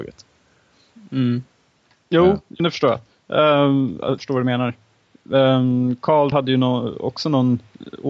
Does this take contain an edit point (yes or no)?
yes